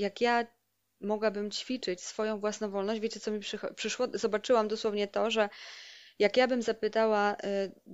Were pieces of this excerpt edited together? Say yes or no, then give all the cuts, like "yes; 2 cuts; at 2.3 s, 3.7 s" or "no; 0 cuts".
no; 0 cuts